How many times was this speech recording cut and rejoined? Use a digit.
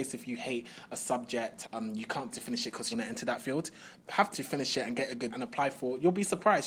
6